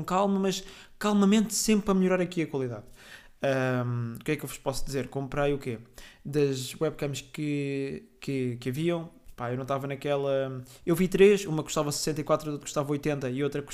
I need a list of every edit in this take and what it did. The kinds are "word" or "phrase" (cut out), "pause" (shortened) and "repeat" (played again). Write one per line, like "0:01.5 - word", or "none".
0:12.6 - word